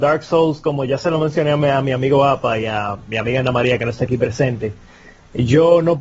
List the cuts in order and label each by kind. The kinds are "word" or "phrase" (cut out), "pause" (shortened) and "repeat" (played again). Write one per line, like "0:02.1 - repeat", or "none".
none